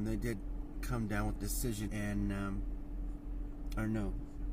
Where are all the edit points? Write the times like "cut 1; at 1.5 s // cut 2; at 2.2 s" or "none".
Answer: cut 1; at 1.4 s // cut 2; at 1.9 s